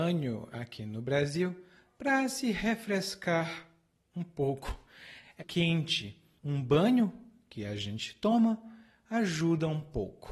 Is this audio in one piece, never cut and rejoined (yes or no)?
no